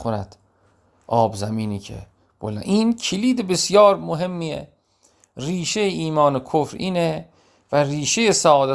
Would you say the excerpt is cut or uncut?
uncut